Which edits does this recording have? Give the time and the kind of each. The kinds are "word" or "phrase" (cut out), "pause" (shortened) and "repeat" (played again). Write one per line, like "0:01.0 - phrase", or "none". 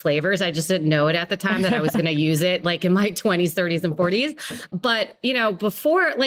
none